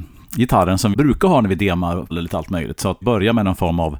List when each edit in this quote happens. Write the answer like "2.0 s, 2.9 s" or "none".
0.9 s, 2.1 s, 3.0 s